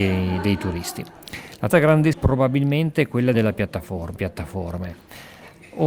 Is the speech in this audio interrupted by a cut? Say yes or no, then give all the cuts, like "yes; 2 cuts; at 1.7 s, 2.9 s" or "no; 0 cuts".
yes; 4 cuts; at 1.7 s, 2.1 s, 3.3 s, 4.2 s